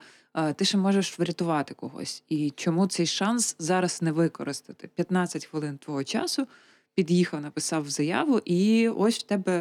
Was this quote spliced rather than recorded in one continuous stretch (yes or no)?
no